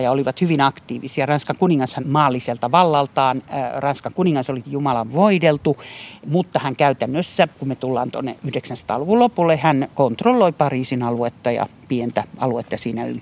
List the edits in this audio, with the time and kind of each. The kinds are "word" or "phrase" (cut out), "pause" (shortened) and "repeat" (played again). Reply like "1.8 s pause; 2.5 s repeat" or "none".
2.0 s phrase; 4.6 s word; 7.5 s pause